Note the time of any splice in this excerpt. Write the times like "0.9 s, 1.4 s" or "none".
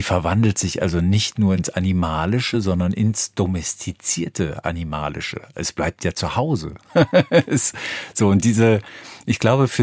none